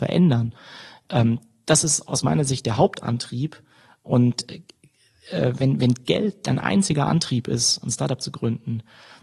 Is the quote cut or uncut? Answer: uncut